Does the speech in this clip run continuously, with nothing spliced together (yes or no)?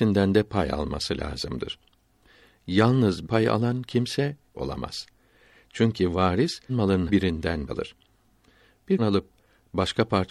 no